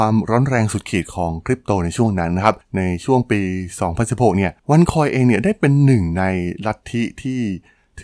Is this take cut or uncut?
cut